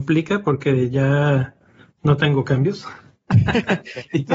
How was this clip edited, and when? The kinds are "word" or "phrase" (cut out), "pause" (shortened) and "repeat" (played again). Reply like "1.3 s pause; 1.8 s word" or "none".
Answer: none